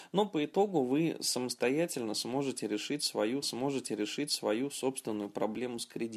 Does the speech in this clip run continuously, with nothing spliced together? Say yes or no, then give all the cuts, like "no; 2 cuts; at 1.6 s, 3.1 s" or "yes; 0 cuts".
no; 1 cut; at 3.4 s